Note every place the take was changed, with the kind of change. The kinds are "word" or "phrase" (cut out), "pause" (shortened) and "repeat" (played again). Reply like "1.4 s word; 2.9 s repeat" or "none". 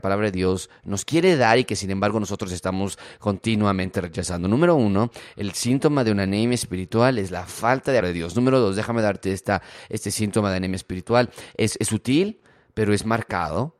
8.0 s phrase

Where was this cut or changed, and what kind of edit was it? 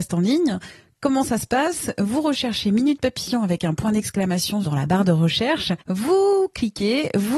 5.8 s pause

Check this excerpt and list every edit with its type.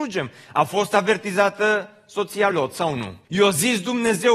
2.5 s word; 3.2 s pause

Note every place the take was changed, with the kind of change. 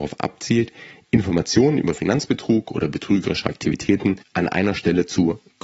none

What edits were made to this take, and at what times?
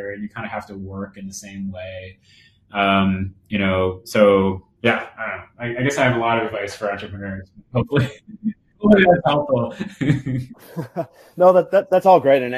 none

